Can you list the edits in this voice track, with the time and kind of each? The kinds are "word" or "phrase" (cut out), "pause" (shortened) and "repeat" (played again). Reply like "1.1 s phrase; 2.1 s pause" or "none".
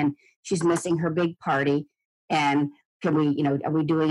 none